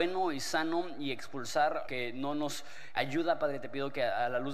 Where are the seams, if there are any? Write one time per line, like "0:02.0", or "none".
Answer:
0:01.8
0:02.9